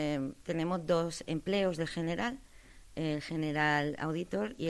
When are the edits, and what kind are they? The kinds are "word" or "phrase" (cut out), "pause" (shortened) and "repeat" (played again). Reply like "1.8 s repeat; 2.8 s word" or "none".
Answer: none